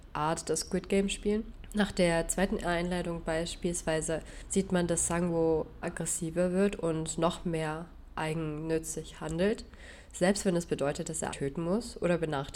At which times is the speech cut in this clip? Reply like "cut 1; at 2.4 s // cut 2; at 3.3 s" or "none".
cut 1; at 5.8 s // cut 2; at 11.3 s